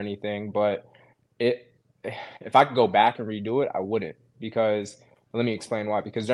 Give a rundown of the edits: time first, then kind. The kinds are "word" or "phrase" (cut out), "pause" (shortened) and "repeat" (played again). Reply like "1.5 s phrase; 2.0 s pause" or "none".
none